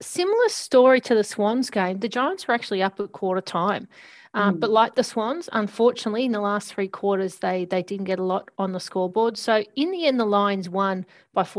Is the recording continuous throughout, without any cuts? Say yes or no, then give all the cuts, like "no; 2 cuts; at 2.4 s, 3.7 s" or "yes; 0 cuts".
yes; 0 cuts